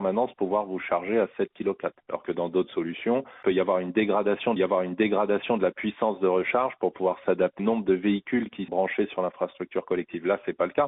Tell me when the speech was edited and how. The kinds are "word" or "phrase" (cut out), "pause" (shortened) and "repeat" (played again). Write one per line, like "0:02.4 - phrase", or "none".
0:02.0 - pause
0:04.6 - repeat
0:07.6 - word
0:08.7 - word